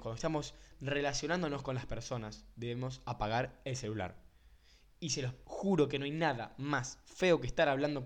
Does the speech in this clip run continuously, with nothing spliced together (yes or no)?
yes